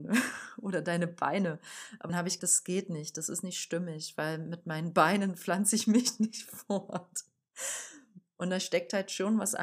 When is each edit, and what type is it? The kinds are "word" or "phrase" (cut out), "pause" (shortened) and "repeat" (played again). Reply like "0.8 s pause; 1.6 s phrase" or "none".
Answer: 2.1 s word; 2.4 s word